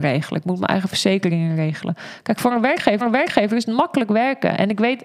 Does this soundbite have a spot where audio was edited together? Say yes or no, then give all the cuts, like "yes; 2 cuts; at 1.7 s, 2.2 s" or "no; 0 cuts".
yes; 1 cut; at 3.0 s